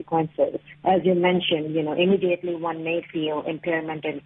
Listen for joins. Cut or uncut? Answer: uncut